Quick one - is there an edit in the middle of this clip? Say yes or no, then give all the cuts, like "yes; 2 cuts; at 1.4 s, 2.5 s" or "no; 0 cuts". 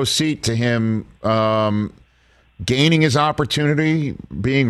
no; 0 cuts